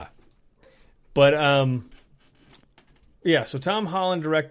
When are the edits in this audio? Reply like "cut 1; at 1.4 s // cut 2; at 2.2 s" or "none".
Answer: cut 1; at 3.2 s